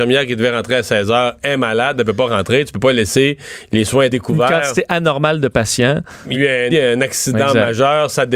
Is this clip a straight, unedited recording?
no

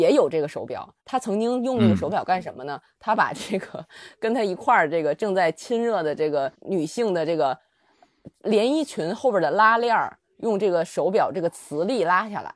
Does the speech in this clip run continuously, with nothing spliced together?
no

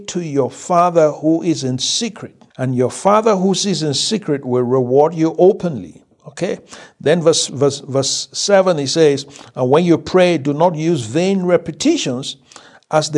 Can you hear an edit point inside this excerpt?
yes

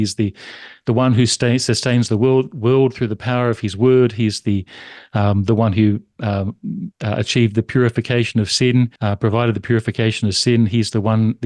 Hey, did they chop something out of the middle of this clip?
yes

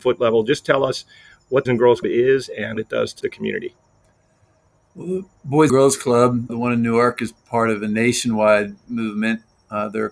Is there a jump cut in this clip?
yes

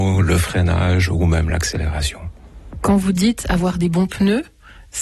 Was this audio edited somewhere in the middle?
no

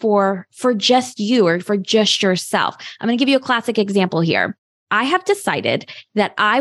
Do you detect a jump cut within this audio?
no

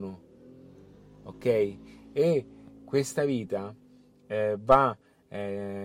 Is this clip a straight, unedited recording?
yes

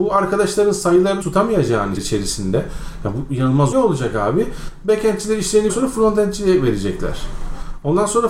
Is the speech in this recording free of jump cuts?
no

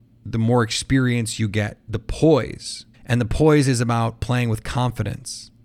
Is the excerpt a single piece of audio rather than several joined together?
no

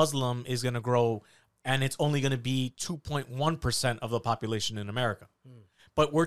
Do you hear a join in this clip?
no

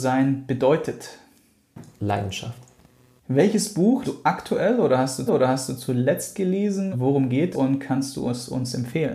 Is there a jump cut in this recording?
yes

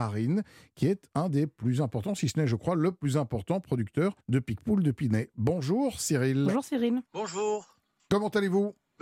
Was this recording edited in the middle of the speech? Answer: yes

